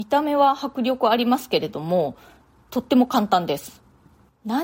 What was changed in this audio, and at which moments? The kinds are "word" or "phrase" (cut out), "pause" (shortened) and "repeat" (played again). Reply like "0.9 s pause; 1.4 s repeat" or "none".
none